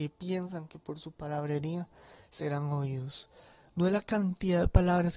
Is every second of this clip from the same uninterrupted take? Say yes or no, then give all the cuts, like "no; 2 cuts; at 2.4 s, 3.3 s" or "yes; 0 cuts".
yes; 0 cuts